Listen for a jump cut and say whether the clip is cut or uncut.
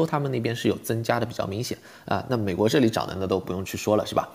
uncut